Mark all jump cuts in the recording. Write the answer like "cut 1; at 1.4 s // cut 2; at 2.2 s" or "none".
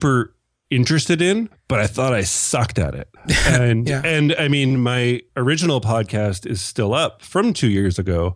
cut 1; at 1.5 s // cut 2; at 3.2 s